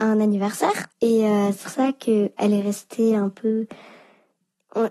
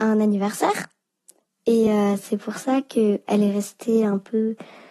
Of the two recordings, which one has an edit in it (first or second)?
first